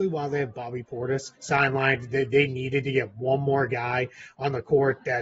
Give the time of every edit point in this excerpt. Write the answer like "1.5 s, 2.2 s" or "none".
1.3 s